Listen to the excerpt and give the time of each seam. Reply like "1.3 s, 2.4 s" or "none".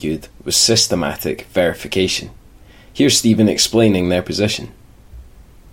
none